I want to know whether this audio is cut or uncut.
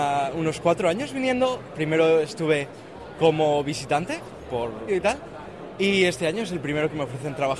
cut